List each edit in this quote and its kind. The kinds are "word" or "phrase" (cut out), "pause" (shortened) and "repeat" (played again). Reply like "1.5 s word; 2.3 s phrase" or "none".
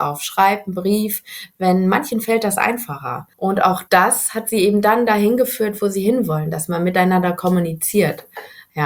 3.3 s pause; 3.9 s pause